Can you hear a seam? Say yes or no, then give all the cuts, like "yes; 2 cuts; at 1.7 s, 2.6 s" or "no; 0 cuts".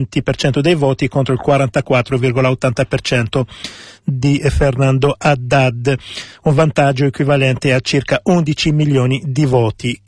no; 0 cuts